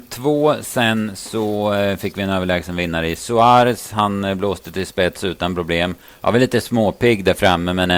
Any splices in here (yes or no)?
no